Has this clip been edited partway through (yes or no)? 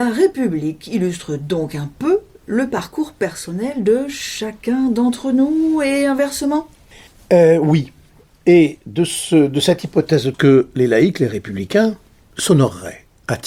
yes